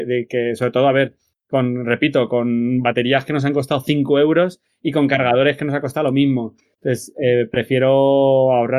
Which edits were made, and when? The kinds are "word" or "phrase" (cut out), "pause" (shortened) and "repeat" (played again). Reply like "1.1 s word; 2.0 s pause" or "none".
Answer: none